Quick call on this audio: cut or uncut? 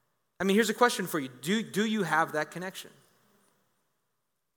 uncut